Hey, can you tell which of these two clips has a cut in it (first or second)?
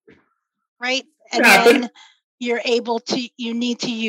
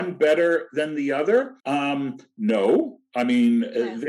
second